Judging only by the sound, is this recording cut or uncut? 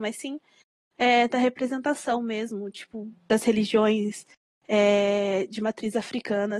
uncut